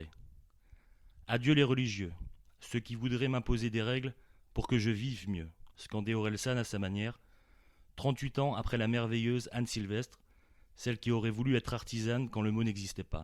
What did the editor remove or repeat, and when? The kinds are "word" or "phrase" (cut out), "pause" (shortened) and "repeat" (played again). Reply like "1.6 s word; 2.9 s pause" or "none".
none